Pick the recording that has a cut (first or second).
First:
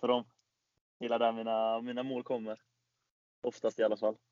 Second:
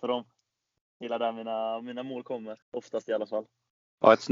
second